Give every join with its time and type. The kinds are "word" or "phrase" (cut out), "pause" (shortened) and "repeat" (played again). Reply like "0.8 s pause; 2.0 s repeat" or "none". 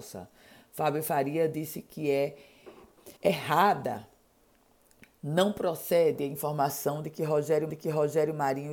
3.2 s pause; 7.7 s repeat